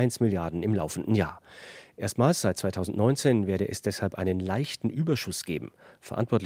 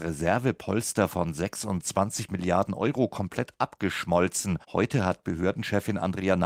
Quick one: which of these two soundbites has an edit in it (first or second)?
second